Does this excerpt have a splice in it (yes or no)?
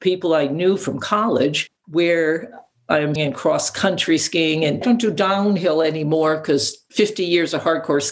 yes